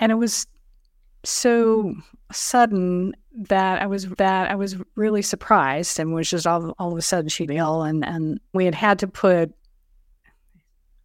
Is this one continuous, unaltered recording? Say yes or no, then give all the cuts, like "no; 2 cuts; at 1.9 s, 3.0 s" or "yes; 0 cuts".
no; 3 cuts; at 4.2 s, 7.5 s, 8.5 s